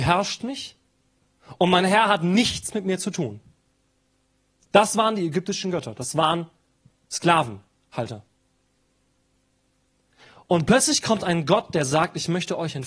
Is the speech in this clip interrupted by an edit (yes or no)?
no